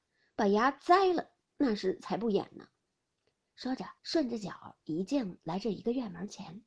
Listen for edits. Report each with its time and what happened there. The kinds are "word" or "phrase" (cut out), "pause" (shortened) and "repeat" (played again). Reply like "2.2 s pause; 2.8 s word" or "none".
4.0 s pause

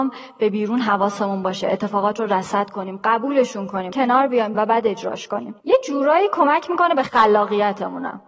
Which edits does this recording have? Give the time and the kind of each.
3.9 s word; 4.5 s phrase; 5.6 s pause

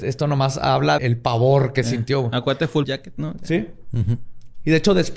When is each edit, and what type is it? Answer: 1.0 s word; 2.8 s word

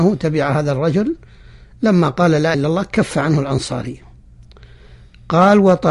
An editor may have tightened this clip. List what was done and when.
2.5 s word

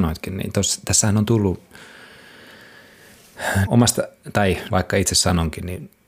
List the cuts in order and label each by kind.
3.7 s phrase; 4.7 s word

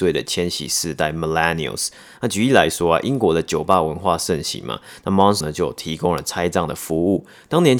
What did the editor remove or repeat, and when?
5.4 s word

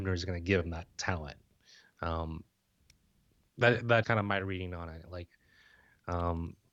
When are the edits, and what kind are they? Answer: 4.0 s word

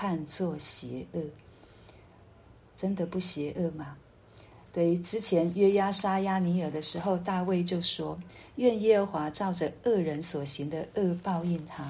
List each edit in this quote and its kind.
none

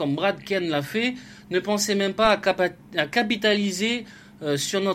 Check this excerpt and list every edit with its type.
none

